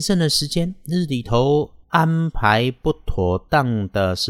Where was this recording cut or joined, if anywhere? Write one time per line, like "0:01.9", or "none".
0:01.8